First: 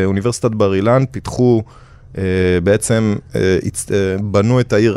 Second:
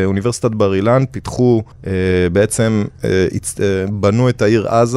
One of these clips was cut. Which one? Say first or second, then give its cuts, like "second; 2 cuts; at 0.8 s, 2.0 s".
second; 1 cut; at 1.7 s